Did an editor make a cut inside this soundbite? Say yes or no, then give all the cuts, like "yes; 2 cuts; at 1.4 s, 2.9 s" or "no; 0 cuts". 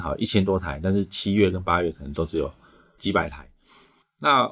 no; 0 cuts